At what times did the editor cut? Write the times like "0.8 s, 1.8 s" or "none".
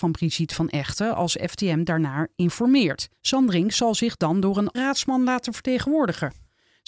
3.2 s, 4.7 s